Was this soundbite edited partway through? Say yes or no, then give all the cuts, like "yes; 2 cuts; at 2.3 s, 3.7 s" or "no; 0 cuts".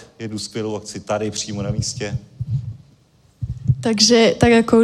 no; 0 cuts